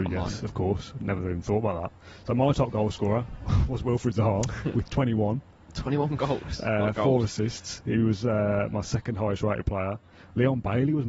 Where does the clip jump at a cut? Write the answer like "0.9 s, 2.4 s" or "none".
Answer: none

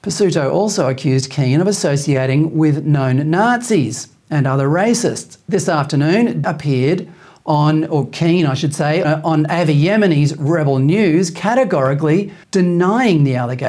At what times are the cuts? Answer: 6.4 s, 9.0 s, 12.4 s

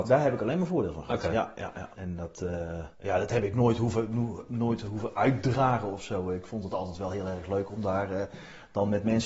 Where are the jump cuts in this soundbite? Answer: 1.9 s, 2.9 s

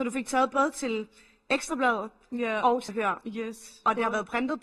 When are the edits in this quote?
2.9 s

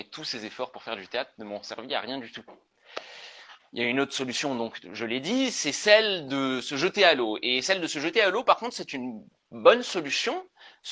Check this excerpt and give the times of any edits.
none

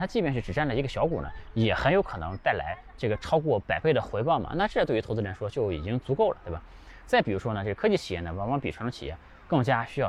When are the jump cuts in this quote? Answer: none

